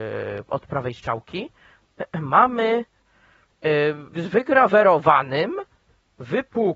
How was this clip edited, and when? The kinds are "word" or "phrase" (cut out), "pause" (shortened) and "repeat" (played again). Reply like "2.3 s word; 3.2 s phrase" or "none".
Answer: 4.1 s word

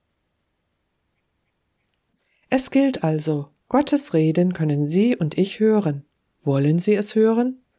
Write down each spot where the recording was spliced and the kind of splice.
3.6 s pause; 6.3 s pause

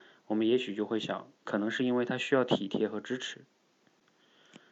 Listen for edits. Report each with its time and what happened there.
1.4 s phrase

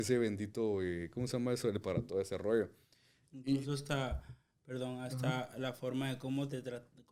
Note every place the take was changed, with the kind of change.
1.8 s word

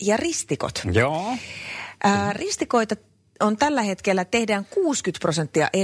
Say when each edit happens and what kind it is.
none

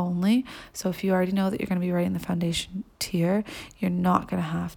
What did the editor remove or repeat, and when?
none

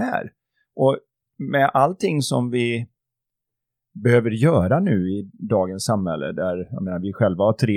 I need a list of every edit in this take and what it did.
none

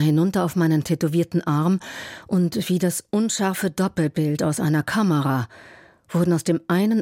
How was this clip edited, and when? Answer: none

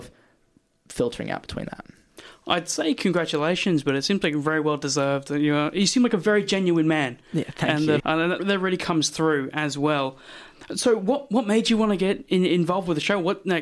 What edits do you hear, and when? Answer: 8.0 s word; 8.4 s word

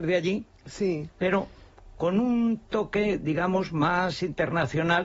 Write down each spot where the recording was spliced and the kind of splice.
none

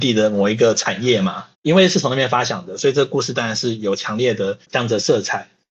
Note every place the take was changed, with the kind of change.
1.5 s pause; 4.6 s pause

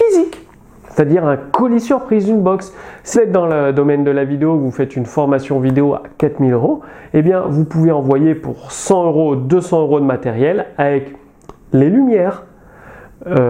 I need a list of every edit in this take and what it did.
3.1 s word

